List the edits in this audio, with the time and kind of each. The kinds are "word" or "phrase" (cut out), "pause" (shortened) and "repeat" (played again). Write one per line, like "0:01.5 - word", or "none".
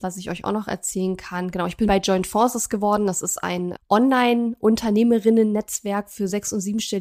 0:01.9 - word
0:03.7 - word